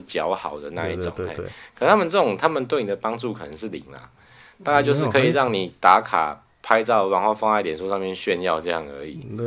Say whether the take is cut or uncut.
uncut